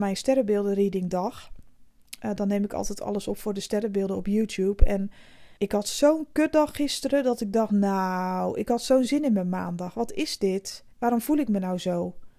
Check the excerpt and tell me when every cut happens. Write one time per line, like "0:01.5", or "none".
0:05.6
0:10.9